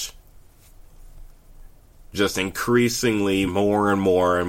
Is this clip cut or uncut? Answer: cut